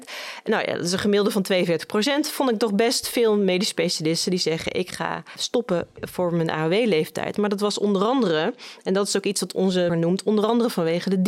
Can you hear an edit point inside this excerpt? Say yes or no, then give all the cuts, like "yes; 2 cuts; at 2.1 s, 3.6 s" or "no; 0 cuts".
yes; 1 cut; at 9.9 s